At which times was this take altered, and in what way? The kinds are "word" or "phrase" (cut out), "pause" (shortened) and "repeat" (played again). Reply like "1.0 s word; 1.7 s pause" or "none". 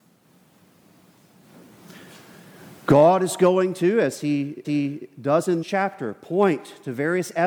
4.6 s repeat; 5.6 s word